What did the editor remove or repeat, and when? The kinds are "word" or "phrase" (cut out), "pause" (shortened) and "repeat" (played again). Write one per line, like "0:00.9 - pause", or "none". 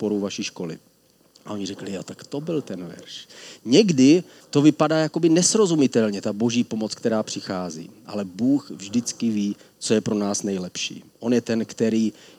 0:04.4 - pause